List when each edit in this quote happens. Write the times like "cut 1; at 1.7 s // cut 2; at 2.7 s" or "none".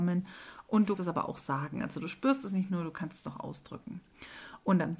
cut 1; at 1.0 s